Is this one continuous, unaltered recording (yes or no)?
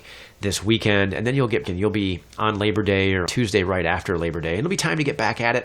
no